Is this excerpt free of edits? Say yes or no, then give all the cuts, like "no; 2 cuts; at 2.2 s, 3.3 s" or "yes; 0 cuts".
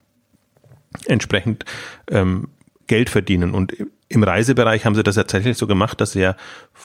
yes; 0 cuts